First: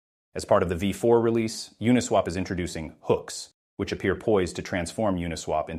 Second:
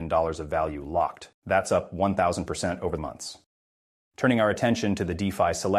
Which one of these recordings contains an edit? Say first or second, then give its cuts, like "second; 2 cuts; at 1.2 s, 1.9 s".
second; 2 cuts; at 1.3 s, 3.0 s